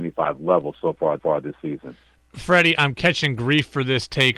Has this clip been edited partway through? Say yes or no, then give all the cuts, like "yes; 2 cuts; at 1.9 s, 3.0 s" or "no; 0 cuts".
yes; 1 cut; at 1.2 s